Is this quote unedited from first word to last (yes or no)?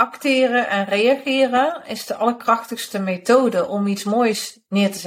yes